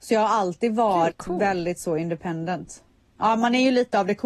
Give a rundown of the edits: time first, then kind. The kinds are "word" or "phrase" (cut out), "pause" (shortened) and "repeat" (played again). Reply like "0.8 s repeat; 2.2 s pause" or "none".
1.1 s word